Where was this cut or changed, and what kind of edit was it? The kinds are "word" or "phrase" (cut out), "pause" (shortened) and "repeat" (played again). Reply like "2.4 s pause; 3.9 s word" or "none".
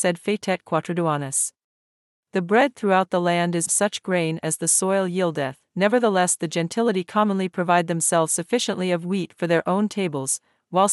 1.7 s pause; 3.7 s phrase; 5.7 s pause